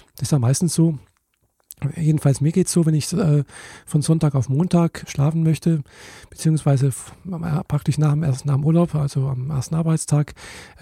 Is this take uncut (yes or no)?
no